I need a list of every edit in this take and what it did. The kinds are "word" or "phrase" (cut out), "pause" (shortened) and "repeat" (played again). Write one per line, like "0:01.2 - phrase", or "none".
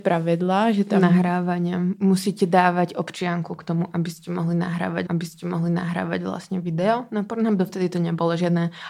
0:05.1 - repeat